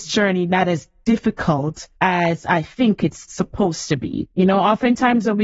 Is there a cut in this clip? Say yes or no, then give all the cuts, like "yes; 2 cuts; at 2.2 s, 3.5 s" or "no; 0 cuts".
yes; 2 cuts; at 2.0 s, 4.3 s